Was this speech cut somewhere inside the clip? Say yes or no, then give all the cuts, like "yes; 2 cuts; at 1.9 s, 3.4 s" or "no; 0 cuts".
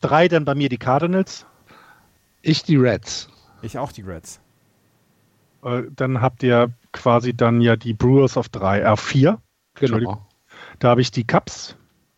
no; 0 cuts